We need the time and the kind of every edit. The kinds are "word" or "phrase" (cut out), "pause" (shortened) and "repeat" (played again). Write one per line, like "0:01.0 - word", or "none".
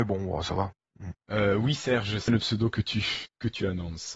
0:01.2 - pause
0:02.3 - word